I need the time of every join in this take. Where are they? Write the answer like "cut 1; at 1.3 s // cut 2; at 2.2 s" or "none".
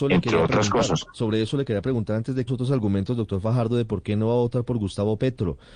cut 1; at 2.5 s